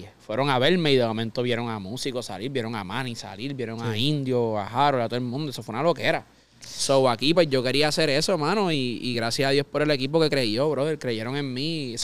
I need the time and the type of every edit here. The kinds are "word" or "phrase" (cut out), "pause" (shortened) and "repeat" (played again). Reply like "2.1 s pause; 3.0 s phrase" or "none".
none

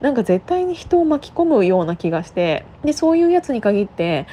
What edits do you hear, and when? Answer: 2.7 s pause

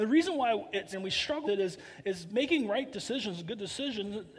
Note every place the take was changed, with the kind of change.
0.9 s word; 1.4 s word

